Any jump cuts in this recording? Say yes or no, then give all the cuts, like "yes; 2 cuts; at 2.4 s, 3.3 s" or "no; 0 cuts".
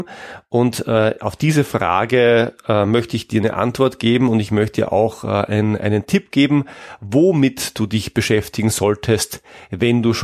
no; 0 cuts